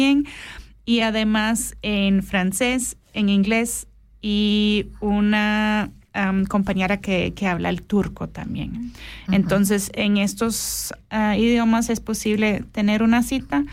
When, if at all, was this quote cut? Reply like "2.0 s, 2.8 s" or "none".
none